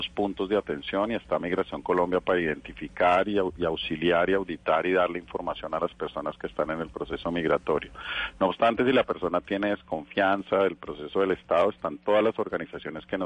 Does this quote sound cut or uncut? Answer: uncut